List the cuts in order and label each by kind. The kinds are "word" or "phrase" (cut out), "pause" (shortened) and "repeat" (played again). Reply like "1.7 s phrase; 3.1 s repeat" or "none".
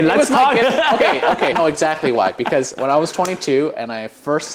1.5 s word